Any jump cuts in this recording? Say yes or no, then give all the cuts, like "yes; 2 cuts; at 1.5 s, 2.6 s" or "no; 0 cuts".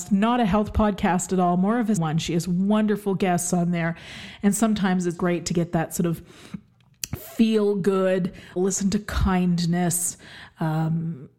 yes; 3 cuts; at 2.0 s, 5.2 s, 8.6 s